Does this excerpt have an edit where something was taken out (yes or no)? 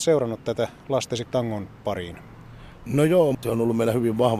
yes